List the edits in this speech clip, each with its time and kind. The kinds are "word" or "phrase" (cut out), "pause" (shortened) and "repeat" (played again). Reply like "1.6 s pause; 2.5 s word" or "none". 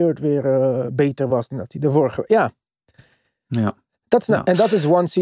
none